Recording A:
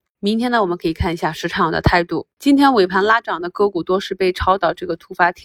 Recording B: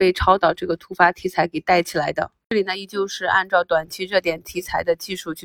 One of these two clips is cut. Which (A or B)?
A